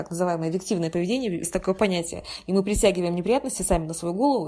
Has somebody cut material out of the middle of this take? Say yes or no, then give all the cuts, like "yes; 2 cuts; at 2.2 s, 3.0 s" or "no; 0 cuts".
yes; 1 cut; at 1.4 s